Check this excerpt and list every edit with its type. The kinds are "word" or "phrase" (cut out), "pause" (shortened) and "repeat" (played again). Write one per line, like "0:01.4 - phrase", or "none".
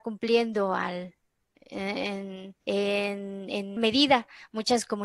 0:02.6 - pause
0:03.8 - word